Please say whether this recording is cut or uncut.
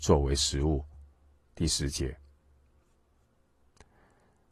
uncut